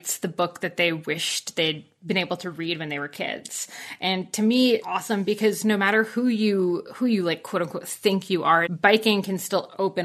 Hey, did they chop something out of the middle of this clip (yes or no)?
yes